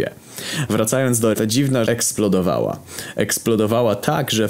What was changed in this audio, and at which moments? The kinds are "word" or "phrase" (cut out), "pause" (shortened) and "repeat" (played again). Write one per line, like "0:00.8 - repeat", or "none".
0:01.3 - word
0:01.9 - word